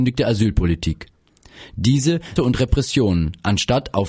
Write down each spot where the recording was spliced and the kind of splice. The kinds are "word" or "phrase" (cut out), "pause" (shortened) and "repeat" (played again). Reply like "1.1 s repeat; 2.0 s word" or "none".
2.4 s phrase